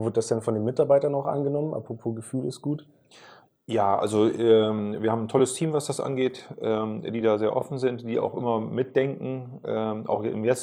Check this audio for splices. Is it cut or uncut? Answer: uncut